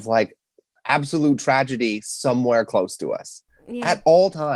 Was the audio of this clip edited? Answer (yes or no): no